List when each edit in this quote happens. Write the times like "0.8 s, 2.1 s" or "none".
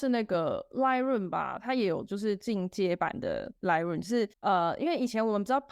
3.6 s, 4.3 s